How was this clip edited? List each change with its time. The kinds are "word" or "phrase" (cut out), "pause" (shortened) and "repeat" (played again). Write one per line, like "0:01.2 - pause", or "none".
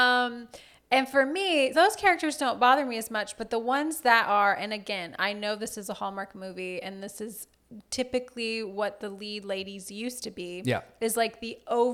0:01.7 - word